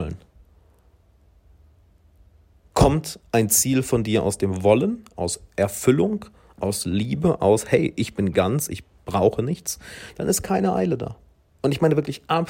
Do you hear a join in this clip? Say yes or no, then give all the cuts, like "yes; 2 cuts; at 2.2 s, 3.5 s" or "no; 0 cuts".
no; 0 cuts